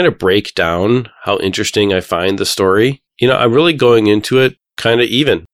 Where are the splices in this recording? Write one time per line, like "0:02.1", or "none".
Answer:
none